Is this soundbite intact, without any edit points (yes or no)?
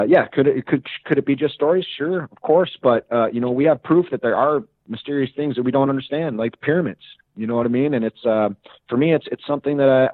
yes